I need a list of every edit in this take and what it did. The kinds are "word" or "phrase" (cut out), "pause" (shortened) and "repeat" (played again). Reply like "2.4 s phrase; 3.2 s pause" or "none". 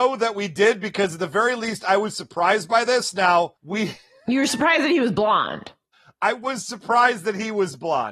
3.6 s pause; 5.9 s pause